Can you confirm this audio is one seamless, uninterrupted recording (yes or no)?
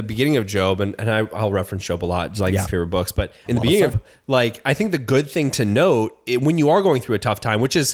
no